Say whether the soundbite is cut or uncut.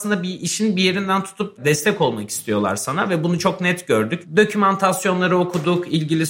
uncut